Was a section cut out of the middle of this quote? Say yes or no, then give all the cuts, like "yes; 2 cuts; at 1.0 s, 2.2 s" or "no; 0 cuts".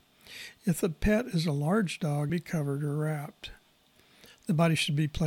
yes; 1 cut; at 2.3 s